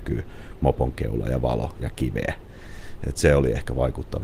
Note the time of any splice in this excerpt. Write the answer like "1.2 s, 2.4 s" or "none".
none